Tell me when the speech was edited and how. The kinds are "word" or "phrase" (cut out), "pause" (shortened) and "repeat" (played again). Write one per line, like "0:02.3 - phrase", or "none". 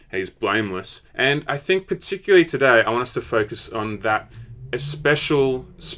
0:01.1 - pause